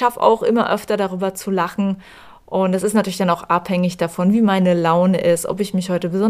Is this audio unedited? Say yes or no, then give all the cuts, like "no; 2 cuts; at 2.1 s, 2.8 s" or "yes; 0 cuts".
yes; 0 cuts